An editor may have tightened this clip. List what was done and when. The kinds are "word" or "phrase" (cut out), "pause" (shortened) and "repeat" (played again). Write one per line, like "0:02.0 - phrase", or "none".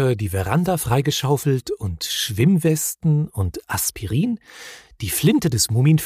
none